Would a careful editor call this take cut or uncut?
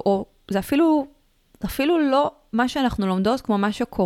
uncut